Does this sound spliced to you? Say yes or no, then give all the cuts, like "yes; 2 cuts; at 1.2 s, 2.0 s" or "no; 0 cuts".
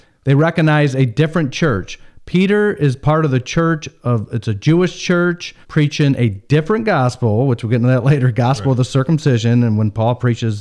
yes; 1 cut; at 5.6 s